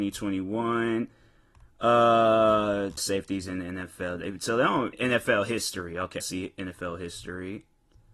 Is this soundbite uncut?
no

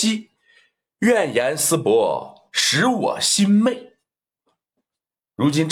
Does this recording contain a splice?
no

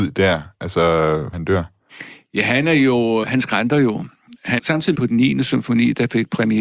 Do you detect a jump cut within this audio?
yes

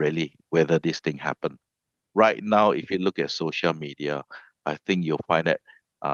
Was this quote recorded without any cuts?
yes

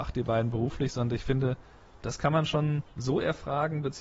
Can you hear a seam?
yes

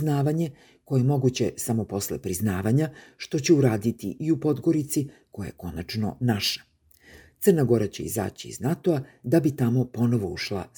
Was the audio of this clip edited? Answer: no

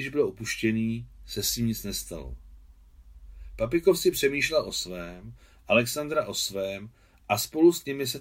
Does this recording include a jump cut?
no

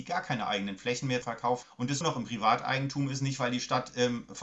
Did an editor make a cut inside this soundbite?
yes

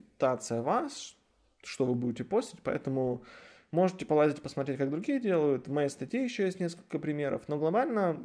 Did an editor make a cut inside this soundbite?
no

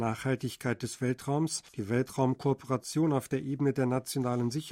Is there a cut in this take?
yes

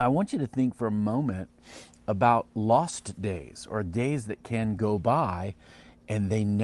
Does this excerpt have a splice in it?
no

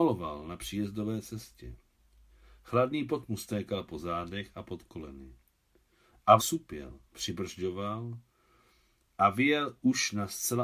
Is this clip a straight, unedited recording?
no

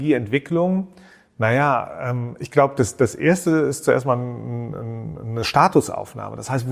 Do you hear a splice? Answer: no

